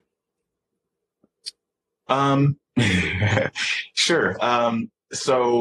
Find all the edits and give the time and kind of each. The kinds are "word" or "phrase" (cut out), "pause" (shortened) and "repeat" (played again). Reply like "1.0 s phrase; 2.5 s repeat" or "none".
2.6 s pause